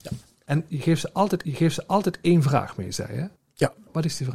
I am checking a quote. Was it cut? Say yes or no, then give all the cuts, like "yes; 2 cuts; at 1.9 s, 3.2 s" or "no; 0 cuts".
yes; 2 cuts; at 1.4 s, 3.4 s